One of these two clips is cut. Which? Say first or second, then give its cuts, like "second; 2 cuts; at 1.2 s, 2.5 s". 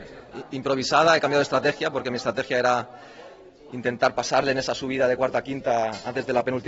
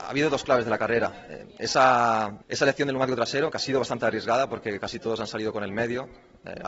second; 1 cut; at 2.4 s